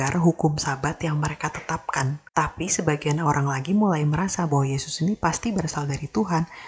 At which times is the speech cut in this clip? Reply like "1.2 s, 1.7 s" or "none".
2.3 s